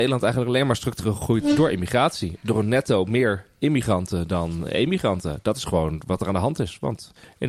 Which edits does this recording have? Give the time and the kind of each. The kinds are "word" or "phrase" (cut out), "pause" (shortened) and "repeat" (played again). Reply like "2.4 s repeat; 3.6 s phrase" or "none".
none